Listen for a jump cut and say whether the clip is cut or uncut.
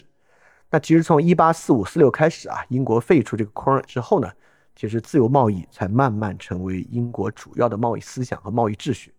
cut